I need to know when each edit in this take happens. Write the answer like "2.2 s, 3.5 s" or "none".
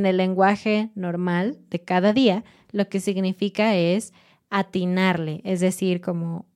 none